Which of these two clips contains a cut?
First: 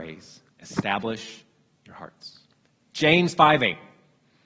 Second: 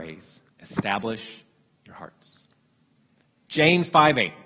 first; 1 cut; at 2.6 s

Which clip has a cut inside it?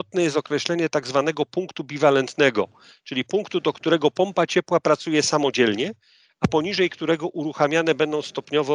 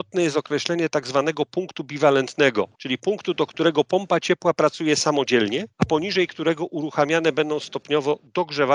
second; 2 cuts; at 2.7 s, 5.7 s

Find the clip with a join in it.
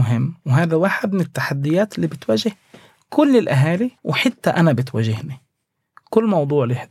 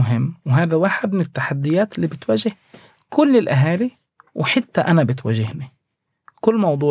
first; 1 cut; at 4.0 s

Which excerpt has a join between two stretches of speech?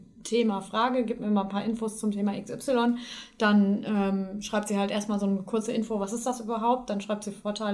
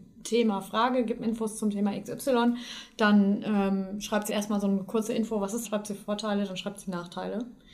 second; 3 cuts; at 1.2 s, 4.3 s, 5.6 s

